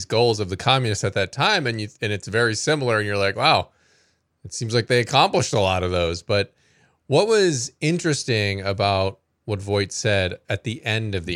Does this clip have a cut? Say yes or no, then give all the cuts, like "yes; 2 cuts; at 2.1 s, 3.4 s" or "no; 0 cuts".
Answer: no; 0 cuts